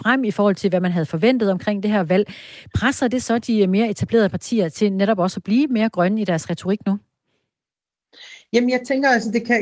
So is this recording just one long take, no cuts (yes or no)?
yes